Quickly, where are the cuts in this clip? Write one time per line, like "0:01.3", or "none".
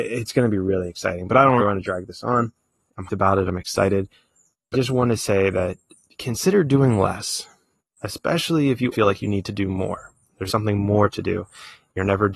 0:01.6
0:03.1
0:04.7
0:08.9
0:10.5